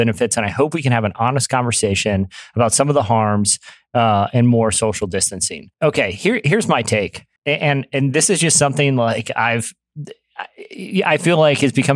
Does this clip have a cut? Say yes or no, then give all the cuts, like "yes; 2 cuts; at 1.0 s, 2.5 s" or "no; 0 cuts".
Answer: yes; 2 cuts; at 5.7 s, 7.4 s